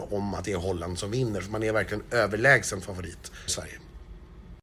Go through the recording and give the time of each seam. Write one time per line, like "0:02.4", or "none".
0:03.5

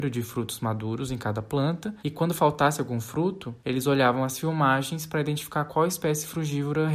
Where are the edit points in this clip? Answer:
0:02.0
0:03.6

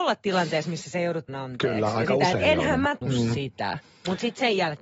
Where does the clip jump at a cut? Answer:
0:01.3
0:03.0

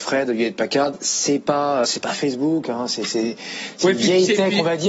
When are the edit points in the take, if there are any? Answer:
0:01.8

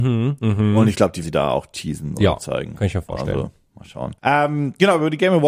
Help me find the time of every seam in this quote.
0:01.2
0:04.2

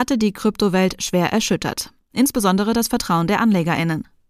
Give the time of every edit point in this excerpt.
none

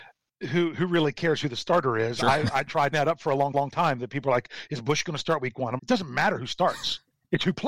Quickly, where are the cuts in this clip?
0:02.9
0:03.5
0:05.8

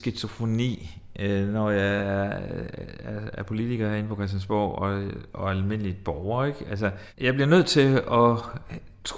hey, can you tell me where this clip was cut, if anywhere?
none

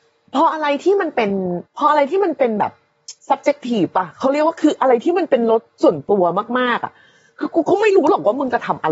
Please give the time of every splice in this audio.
0:01.7
0:03.2

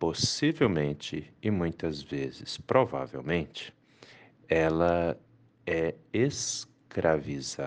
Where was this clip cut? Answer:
none

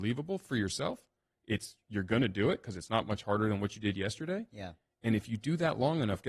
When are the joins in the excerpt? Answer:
none

